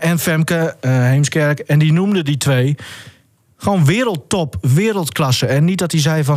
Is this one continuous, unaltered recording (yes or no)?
yes